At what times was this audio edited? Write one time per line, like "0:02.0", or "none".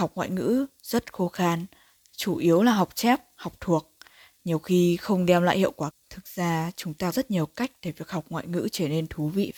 0:05.9
0:07.1